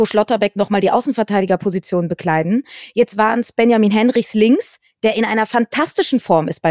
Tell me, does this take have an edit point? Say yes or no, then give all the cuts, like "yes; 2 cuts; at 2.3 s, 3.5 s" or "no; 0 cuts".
no; 0 cuts